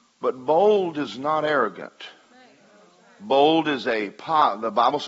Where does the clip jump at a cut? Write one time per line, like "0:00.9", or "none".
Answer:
none